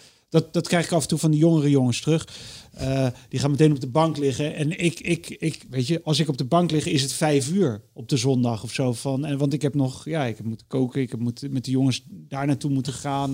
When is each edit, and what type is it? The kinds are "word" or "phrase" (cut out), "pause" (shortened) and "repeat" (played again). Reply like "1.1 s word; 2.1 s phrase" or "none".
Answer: none